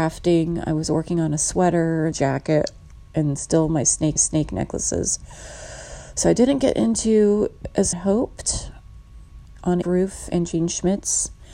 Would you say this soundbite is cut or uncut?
cut